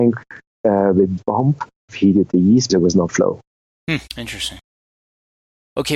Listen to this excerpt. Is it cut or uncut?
cut